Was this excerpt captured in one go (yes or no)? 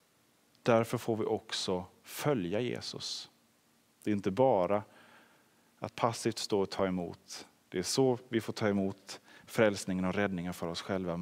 yes